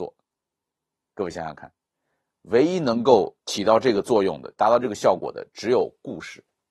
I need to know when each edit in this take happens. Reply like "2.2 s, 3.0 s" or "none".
3.4 s